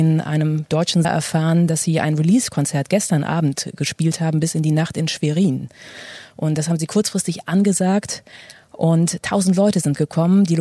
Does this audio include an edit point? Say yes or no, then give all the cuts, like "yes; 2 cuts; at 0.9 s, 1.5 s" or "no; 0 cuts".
yes; 1 cut; at 1.0 s